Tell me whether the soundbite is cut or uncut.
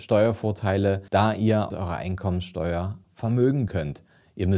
cut